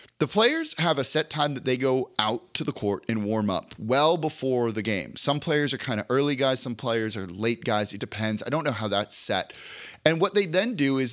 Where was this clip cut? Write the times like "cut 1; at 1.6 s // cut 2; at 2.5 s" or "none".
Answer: cut 1; at 8.0 s